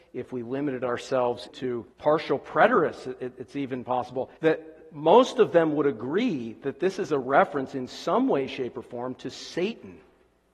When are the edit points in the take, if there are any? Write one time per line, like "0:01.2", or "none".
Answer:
0:01.5
0:01.9
0:04.4